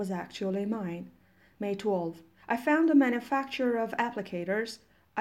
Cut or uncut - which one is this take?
uncut